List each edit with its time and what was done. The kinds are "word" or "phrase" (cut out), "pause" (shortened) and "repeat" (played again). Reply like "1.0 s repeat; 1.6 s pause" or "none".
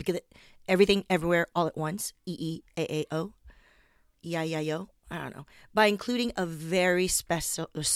none